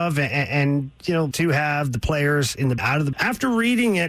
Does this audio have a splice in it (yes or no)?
yes